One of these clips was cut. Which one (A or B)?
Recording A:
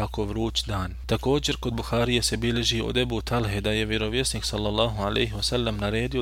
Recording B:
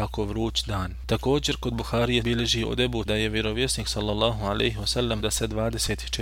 B